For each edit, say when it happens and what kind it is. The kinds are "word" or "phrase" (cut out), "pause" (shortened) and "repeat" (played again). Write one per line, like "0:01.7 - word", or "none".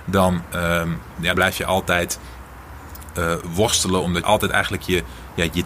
0:01.3 - word
0:04.2 - phrase